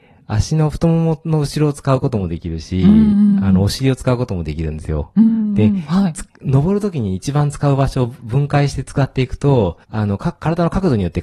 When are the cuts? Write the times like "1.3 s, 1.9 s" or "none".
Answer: 9.8 s

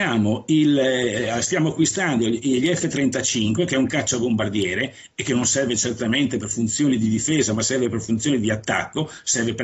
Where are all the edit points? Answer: none

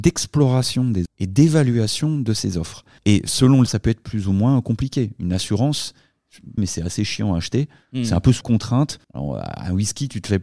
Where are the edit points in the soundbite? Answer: 1.1 s, 3.0 s, 3.7 s, 6.6 s, 8.4 s, 9.0 s

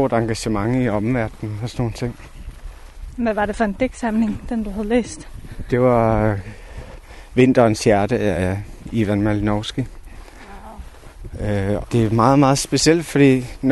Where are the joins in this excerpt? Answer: 11.8 s

